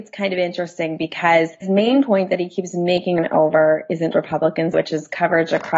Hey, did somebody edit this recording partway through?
yes; 4 cuts; at 1.6 s, 3.2 s, 4.1 s, 4.7 s

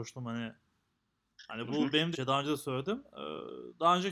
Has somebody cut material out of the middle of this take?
yes; 1 cut; at 2.1 s

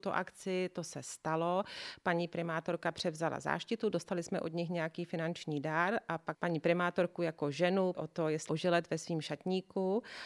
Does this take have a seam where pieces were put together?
yes; 3 cuts; at 6.3 s, 7.9 s, 8.5 s

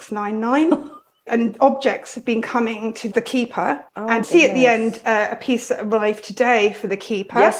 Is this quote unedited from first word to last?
no; 2 cuts; at 3.9 s, 4.2 s

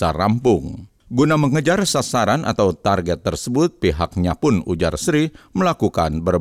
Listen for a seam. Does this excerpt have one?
no; 0 cuts

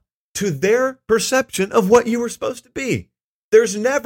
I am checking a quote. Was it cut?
no; 0 cuts

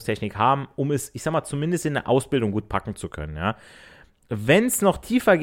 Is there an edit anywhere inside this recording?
no; 0 cuts

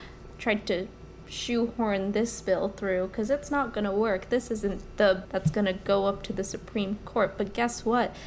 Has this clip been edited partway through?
yes; 1 cut; at 5.2 s

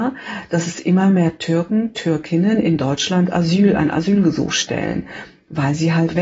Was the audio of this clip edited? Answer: no; 0 cuts

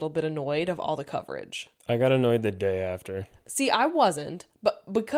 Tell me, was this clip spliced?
no; 0 cuts

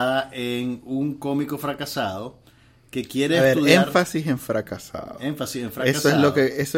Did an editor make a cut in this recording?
no; 0 cuts

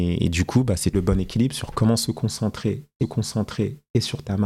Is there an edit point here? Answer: yes; 2 cuts; at 0.9 s, 3.0 s

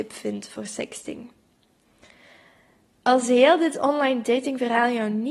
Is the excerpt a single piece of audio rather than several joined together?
yes; 0 cuts

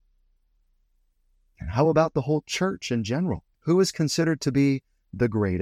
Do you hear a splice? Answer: yes; 1 cut; at 3.5 s

